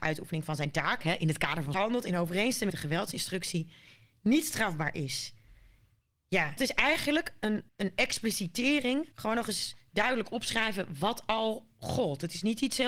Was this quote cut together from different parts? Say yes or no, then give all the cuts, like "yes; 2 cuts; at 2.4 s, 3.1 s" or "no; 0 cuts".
yes; 5 cuts; at 1.7 s, 2.7 s, 6.6 s, 7.7 s, 9.1 s